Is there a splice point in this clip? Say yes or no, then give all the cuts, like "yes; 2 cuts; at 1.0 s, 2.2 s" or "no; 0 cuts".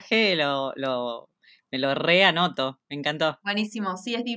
no; 0 cuts